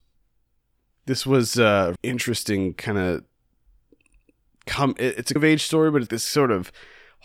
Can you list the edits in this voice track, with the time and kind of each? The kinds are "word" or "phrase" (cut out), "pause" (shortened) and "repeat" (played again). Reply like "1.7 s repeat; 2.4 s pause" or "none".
2.0 s word; 5.4 s word; 6.1 s word

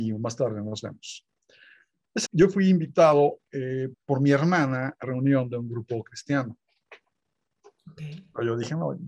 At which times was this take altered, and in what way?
2.3 s word; 3.9 s word; 5.0 s word

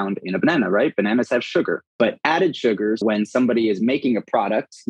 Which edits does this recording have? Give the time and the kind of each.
1.9 s pause; 3.0 s word

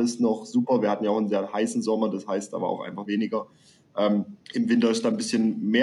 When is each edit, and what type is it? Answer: 3.1 s phrase; 4.4 s pause

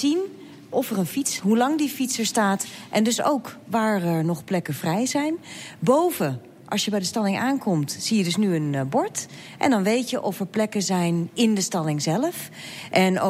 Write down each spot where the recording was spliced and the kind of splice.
1.4 s word

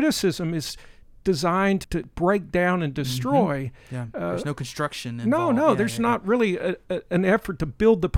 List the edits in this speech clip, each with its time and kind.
1.8 s word

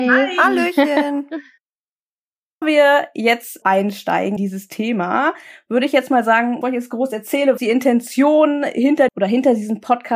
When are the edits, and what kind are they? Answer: 2.6 s word; 3.6 s word; 4.4 s word; 6.6 s word; 7.6 s word; 9.1 s word

